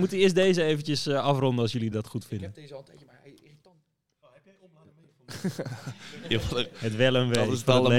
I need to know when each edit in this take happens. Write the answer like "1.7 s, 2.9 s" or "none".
none